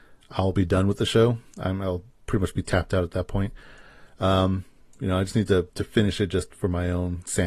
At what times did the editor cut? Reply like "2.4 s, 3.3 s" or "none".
5.7 s

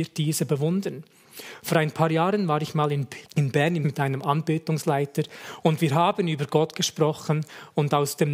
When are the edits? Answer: 3.2 s, 3.8 s

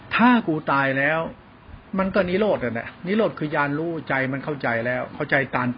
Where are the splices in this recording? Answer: 1.9 s

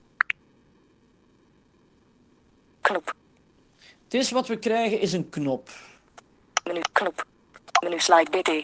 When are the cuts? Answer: none

